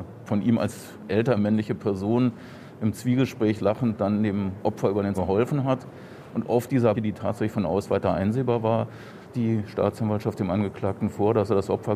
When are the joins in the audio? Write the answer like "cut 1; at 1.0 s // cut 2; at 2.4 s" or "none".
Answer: cut 1; at 1.4 s // cut 2; at 3.5 s // cut 3; at 5.1 s // cut 4; at 6.9 s // cut 5; at 7.8 s // cut 6; at 9.3 s